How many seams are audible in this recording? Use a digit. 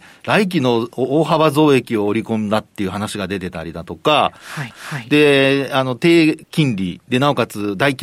2